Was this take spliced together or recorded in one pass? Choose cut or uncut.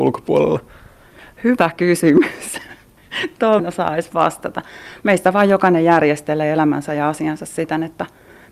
cut